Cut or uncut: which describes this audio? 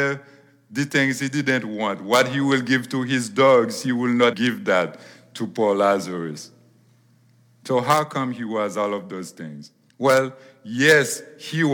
cut